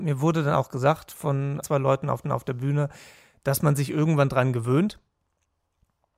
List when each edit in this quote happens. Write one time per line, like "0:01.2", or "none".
0:01.6
0:02.2